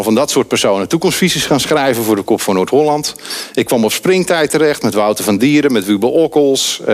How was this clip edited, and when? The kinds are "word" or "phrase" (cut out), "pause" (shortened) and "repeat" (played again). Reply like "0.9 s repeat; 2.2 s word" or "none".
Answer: none